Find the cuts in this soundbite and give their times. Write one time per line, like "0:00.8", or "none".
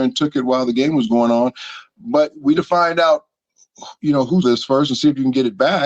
0:02.5
0:04.4